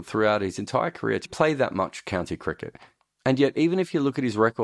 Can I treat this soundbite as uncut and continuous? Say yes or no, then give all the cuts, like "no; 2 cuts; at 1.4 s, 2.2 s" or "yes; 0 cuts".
no; 1 cut; at 1.3 s